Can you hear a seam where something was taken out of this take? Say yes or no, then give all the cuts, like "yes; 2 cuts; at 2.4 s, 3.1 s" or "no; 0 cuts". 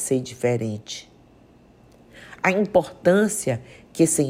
no; 0 cuts